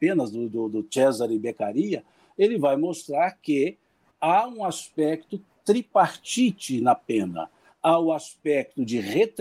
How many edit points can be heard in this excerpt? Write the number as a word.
zero